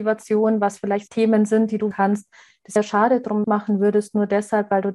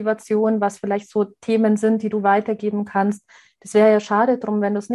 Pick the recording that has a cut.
first; 4 cuts; at 1.1 s, 1.9 s, 2.8 s, 3.4 s

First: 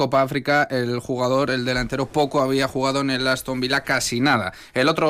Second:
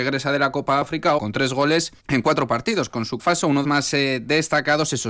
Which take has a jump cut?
second; 4 cuts; at 1.2 s, 2.0 s, 3.2 s, 3.6 s

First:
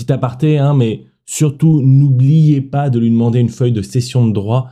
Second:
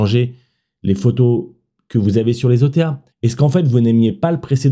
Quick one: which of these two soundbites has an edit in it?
second; 1 cut; at 3.1 s

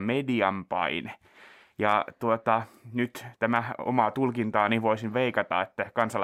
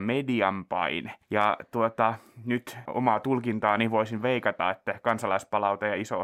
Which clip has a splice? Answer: second; 2 cuts; at 1.2 s, 2.8 s

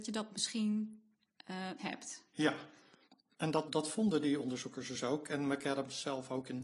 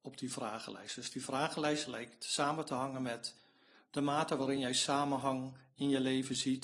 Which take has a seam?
first; 3 cuts; at 1.8 s, 3.1 s, 3.7 s

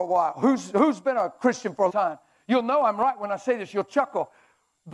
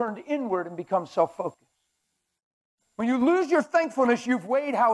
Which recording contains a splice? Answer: first; 1 cut; at 1.9 s

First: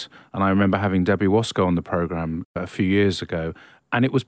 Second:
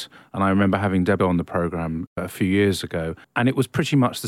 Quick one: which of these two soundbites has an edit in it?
second; 2 cuts; at 1.2 s, 3.2 s

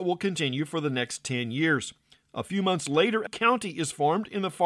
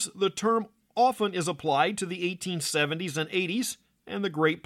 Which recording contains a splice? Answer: first; 1 cut; at 3.3 s

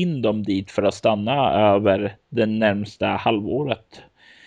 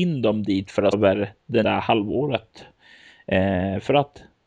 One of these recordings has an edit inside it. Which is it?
second; 2 cuts; at 0.9 s, 1.6 s

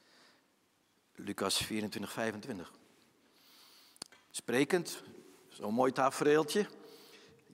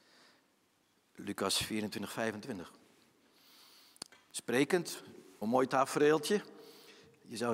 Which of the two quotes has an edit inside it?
second; 1 cut; at 5.4 s

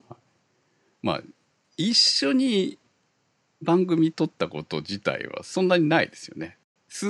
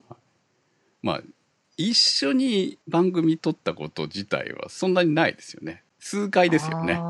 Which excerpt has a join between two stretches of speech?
second; 2 cuts; at 2.8 s, 5.9 s

